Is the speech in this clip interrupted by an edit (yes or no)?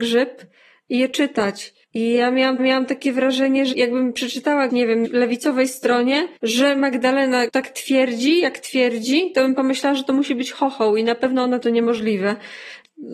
yes